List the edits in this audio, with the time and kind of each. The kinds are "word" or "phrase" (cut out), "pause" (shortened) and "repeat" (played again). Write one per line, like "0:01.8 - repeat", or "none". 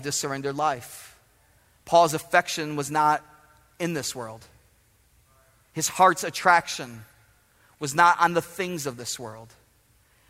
none